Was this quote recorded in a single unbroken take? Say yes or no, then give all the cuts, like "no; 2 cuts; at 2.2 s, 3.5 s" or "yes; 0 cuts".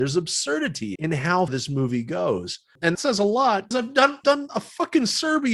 no; 5 cuts; at 1.0 s, 1.5 s, 2.9 s, 3.7 s, 4.2 s